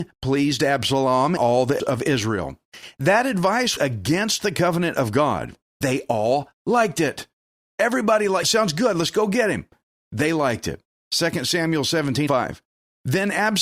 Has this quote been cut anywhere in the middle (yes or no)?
yes